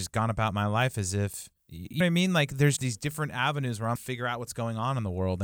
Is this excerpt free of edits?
no; 3 cuts; at 2.0 s, 2.8 s, 4.0 s

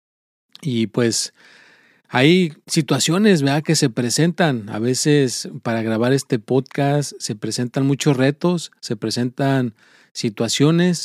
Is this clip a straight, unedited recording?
yes; 0 cuts

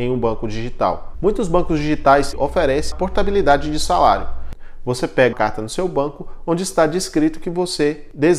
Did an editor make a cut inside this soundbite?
yes; 3 cuts; at 2.3 s, 2.9 s, 5.3 s

